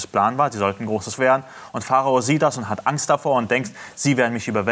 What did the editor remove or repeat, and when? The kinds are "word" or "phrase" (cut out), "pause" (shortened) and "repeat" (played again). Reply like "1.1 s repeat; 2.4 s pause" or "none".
1.2 s word